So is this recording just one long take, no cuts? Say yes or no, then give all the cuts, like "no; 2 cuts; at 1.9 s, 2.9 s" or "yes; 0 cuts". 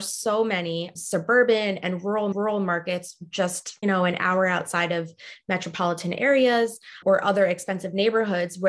no; 4 cuts; at 0.9 s, 2.3 s, 3.8 s, 7.0 s